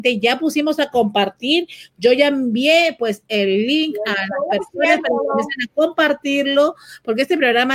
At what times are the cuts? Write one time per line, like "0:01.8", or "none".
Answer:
none

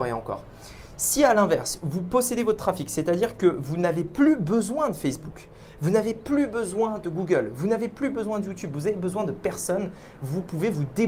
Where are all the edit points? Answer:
none

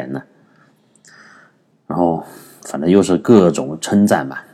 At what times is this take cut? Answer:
none

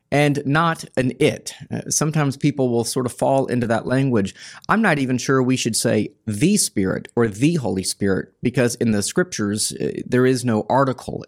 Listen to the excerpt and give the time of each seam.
none

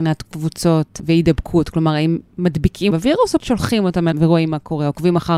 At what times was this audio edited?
0:02.9
0:03.4
0:04.1

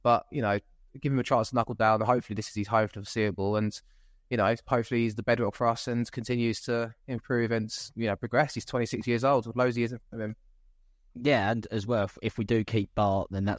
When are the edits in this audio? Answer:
none

